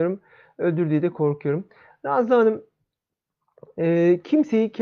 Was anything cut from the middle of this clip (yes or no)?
no